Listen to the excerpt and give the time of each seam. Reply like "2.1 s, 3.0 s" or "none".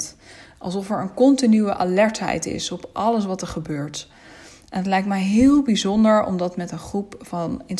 none